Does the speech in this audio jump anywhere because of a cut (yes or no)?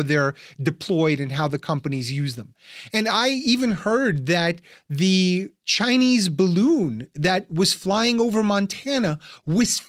no